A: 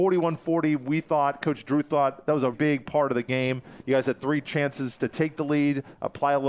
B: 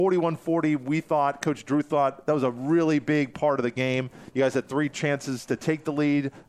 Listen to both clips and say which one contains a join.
A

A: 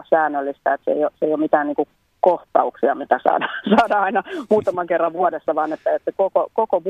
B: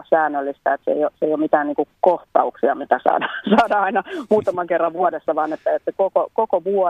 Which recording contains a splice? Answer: B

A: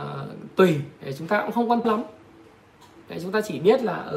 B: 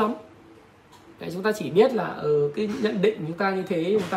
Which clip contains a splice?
A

